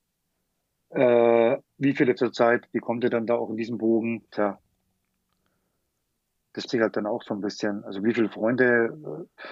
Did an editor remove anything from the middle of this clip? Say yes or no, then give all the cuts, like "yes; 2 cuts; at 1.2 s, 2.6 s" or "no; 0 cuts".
yes; 4 cuts; at 1.7 s, 2.2 s, 4.3 s, 6.7 s